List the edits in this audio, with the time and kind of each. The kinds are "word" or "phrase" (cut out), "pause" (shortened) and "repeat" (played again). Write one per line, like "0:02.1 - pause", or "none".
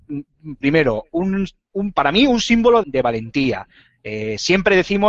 0:02.8 - word